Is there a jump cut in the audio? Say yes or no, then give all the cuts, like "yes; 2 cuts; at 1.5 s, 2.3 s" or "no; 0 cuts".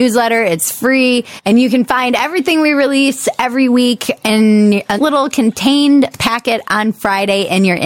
yes; 1 cut; at 5.0 s